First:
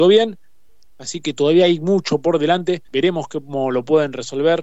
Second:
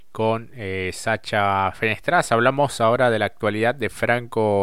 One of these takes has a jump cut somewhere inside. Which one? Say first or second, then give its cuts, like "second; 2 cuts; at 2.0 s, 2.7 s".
first; 1 cut; at 2.9 s